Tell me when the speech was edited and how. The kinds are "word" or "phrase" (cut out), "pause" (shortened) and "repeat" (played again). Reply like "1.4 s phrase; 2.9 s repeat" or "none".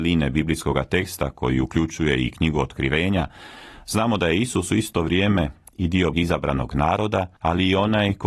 6.1 s word; 7.4 s pause